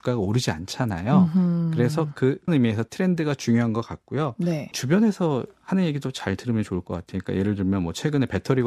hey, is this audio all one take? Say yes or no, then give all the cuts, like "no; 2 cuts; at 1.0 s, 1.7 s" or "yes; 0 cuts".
no; 1 cut; at 2.5 s